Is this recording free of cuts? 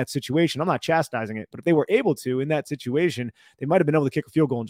yes; 0 cuts

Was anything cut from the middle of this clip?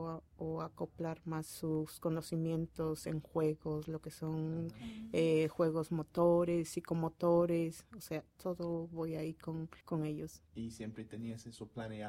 yes; 1 cut; at 9.8 s

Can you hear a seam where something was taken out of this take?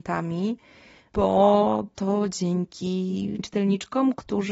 yes; 1 cut; at 3.4 s

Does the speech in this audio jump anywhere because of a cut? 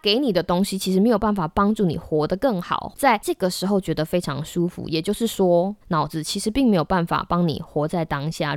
yes; 1 cut; at 5.8 s

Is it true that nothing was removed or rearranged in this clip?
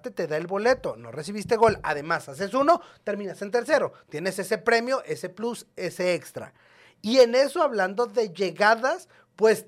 yes; 0 cuts

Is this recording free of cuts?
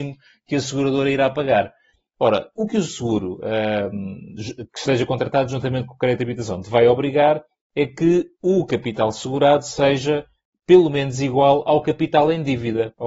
yes; 0 cuts

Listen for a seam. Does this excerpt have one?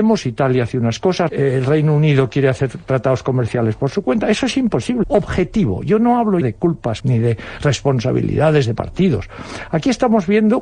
yes; 4 cuts; at 1.3 s, 5.0 s, 6.4 s, 7.0 s

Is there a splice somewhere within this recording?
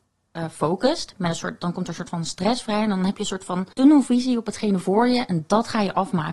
yes; 1 cut; at 3.7 s

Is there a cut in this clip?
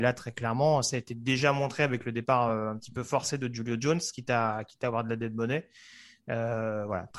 no; 0 cuts

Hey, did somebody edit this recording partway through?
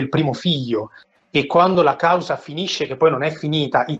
no; 0 cuts

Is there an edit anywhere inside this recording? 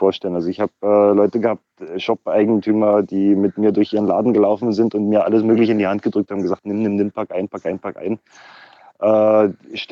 no; 0 cuts

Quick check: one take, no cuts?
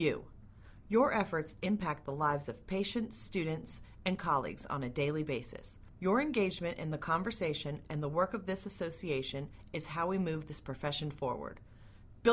no; 1 cut; at 5.9 s

